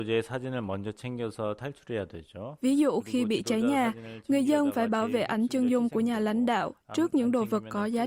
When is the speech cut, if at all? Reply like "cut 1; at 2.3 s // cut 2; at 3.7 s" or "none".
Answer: none